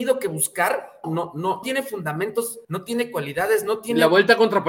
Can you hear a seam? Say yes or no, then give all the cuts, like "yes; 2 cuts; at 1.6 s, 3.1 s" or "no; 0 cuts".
yes; 3 cuts; at 1.0 s, 1.6 s, 2.6 s